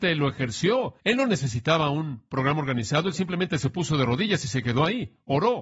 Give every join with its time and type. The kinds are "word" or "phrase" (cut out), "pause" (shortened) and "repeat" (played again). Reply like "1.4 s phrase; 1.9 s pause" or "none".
1.0 s pause